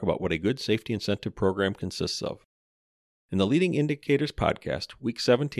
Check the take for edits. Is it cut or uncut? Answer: uncut